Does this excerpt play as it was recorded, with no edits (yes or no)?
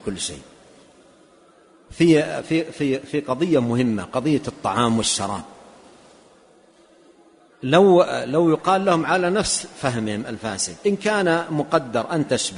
yes